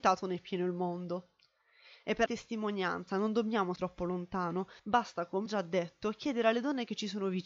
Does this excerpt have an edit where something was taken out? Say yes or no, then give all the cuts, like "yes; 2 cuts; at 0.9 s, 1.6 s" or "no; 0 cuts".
yes; 4 cuts; at 2.3 s, 3.8 s, 4.8 s, 5.5 s